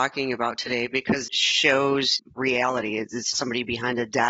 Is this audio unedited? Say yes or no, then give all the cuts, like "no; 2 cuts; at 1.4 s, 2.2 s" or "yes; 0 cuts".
no; 2 cuts; at 1.3 s, 3.3 s